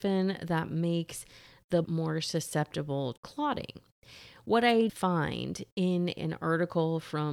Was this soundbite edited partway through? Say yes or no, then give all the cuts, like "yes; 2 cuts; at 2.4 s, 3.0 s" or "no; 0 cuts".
yes; 4 cuts; at 1.8 s, 3.2 s, 4.9 s, 6.2 s